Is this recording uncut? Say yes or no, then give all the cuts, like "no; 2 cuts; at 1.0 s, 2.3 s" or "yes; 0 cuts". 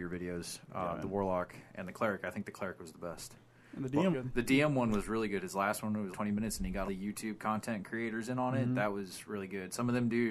no; 3 cuts; at 4.1 s, 6.1 s, 6.9 s